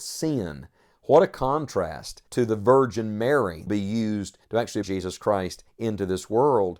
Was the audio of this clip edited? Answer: yes; 5 cuts; at 2.3 s, 3.7 s, 4.4 s, 4.8 s, 5.7 s

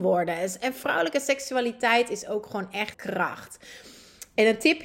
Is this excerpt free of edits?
no; 1 cut; at 2.9 s

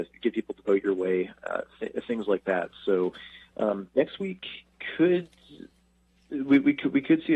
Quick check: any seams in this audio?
no; 0 cuts

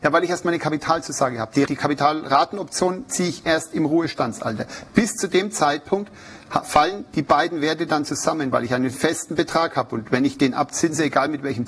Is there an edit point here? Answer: yes; 1 cut; at 1.7 s

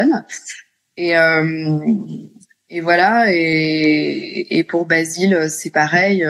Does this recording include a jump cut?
no; 0 cuts

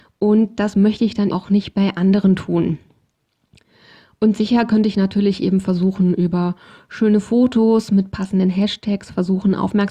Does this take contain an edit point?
yes; 1 cut; at 1.3 s

